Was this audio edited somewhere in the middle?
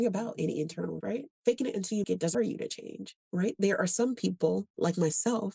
yes; 5 cuts; at 1.0 s, 1.3 s, 2.0 s, 2.3 s, 3.2 s

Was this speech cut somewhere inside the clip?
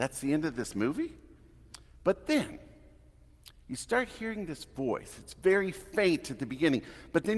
no; 0 cuts

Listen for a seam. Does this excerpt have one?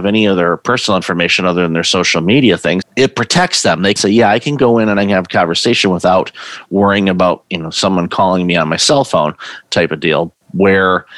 yes; 2 cuts; at 2.8 s, 4.0 s

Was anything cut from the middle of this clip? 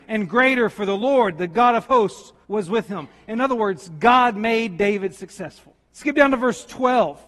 yes; 2 cuts; at 2.4 s, 5.9 s

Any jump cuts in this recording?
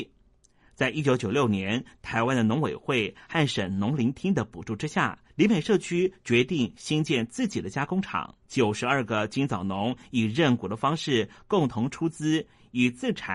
yes; 2 cuts; at 5.3 s, 8.4 s

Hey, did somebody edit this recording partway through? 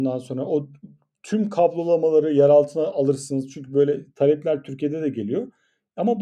no; 0 cuts

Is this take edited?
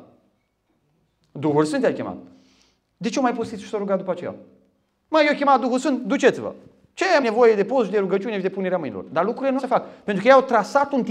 yes; 2 cuts; at 7.2 s, 9.6 s

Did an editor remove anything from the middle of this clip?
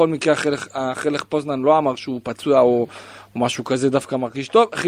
no; 0 cuts

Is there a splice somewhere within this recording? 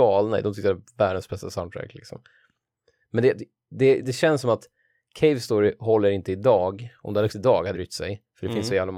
yes; 3 cuts; at 4.0 s, 7.3 s, 7.7 s

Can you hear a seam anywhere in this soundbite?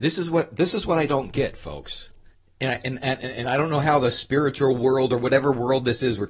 yes; 1 cut; at 2.3 s

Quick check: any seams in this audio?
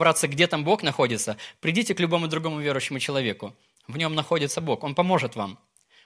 no; 0 cuts

